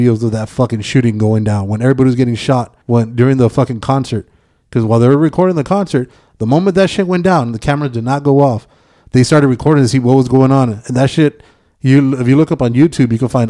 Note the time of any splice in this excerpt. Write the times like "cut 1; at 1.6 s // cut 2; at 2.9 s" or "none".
cut 1; at 2.8 s